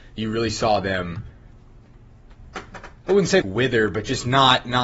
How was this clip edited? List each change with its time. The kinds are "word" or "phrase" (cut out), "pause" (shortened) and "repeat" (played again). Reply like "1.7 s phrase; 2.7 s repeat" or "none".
3.4 s word

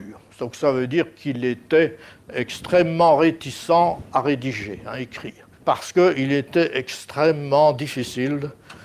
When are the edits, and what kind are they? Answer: 5.5 s pause

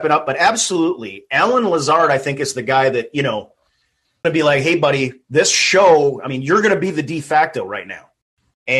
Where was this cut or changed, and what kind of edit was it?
4.2 s word

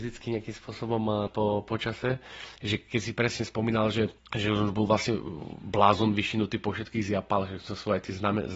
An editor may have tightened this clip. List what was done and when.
1.3 s word; 4.2 s pause

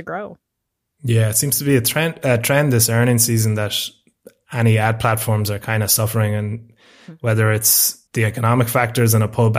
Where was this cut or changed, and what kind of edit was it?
8.1 s pause

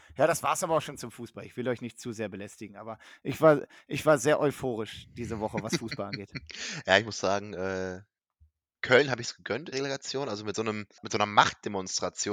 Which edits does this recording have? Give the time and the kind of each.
9.7 s word; 10.5 s phrase

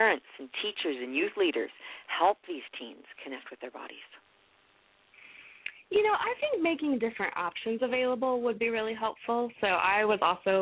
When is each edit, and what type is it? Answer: none

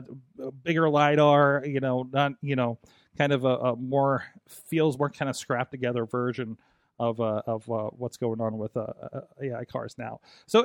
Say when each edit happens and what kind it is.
none

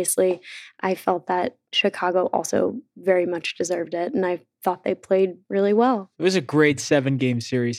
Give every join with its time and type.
1.7 s pause; 5.4 s pause; 6.1 s pause

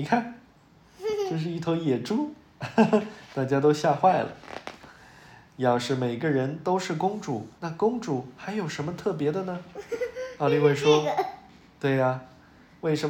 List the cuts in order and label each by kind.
7.6 s pause

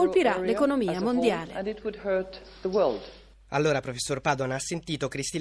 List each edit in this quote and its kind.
none

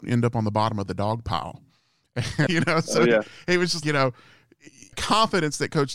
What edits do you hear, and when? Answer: 2.5 s word; 3.8 s word; 4.9 s word

